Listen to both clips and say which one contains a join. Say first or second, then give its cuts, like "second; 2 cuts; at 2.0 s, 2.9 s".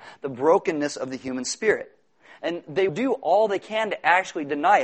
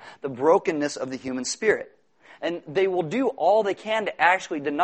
first; 1 cut; at 2.9 s